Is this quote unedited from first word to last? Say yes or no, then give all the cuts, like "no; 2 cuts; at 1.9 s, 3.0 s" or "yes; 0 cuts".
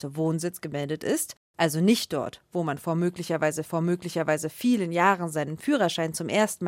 no; 1 cut; at 3.7 s